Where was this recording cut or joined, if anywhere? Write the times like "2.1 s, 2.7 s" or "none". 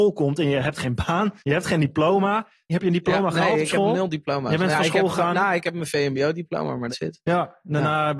1.4 s, 2.7 s, 4.7 s, 6.9 s